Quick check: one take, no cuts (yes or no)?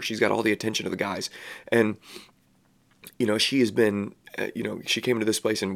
yes